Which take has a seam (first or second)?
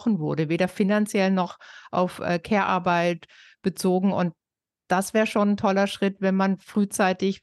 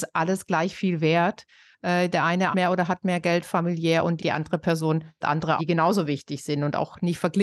second